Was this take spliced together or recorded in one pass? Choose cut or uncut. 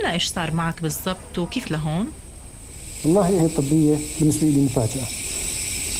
cut